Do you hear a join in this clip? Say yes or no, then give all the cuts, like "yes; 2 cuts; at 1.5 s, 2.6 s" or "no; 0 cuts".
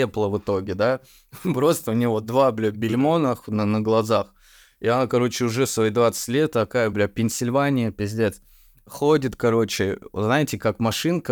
no; 0 cuts